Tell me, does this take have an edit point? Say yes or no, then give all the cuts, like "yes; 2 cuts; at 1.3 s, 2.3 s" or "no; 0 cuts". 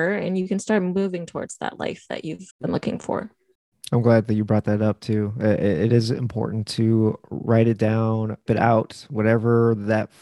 yes; 2 cuts; at 2.5 s, 8.5 s